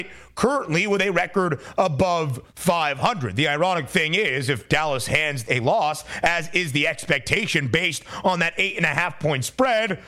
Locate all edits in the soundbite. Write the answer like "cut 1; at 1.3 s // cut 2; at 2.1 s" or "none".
cut 1; at 5.5 s